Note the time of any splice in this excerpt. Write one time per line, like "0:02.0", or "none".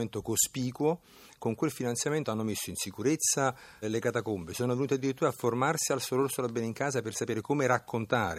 0:03.8